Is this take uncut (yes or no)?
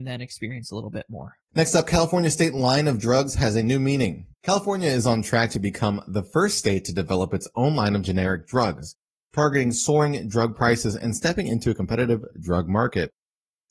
no